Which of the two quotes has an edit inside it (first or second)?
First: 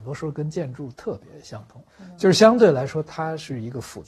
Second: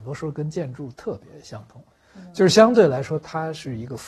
first